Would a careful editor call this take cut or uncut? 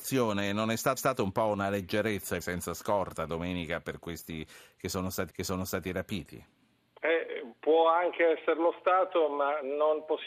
cut